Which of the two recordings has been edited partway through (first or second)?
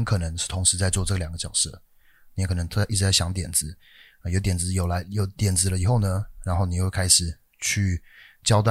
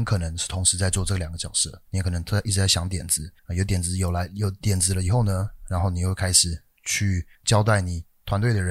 second